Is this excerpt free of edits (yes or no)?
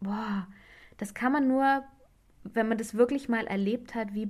yes